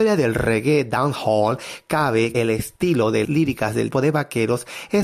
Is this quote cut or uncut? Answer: cut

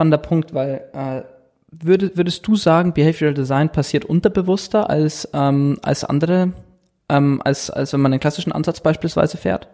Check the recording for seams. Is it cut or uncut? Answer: uncut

